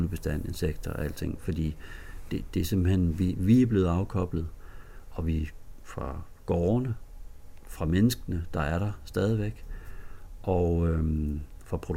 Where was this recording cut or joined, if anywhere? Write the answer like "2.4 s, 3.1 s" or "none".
none